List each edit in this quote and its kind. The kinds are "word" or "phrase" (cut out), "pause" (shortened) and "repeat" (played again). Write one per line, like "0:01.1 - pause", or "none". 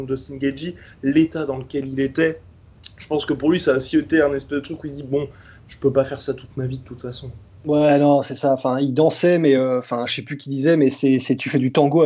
none